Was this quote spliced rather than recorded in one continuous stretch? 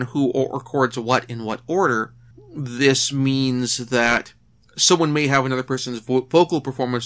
no; 0 cuts

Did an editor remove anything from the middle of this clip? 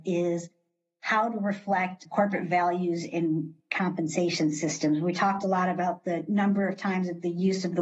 no; 0 cuts

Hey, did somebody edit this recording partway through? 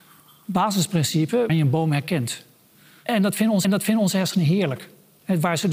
yes; 2 cuts; at 1.5 s, 3.6 s

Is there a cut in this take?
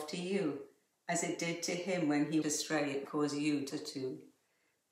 yes; 3 cuts; at 2.4 s, 3.0 s, 3.7 s

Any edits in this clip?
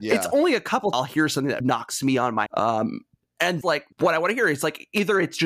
yes; 5 cuts; at 0.9 s, 1.6 s, 2.5 s, 3.6 s, 3.9 s

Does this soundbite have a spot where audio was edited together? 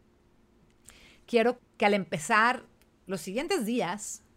yes; 1 cut; at 1.6 s

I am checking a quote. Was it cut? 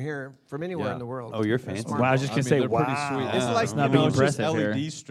no; 0 cuts

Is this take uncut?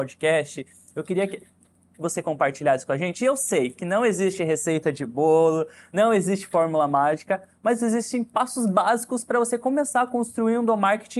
yes; 0 cuts

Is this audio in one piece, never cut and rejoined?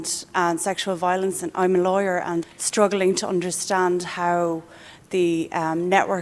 no; 1 cut; at 2.4 s

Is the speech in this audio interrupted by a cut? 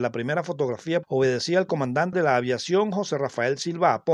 yes; 2 cuts; at 1.0 s, 2.1 s

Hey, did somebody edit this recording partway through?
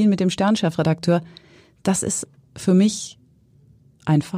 yes; 1 cut; at 2.4 s

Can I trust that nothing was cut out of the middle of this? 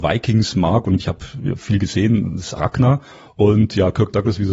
no; 2 cuts; at 1.0 s, 2.6 s

